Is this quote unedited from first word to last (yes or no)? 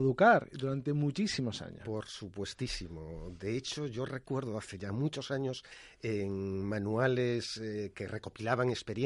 yes